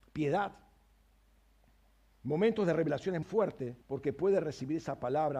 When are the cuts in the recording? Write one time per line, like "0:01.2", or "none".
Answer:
0:03.2
0:03.8